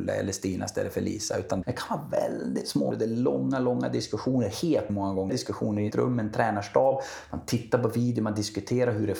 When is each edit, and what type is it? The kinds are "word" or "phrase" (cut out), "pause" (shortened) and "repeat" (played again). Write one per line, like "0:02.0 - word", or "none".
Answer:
0:01.6 - word
0:02.9 - word
0:04.9 - word
0:05.3 - word
0:05.9 - word